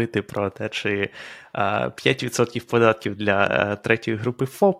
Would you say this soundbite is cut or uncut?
uncut